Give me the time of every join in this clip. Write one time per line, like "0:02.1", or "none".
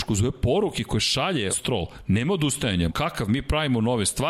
0:01.5
0:02.9